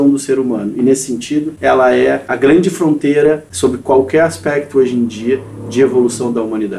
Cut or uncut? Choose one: uncut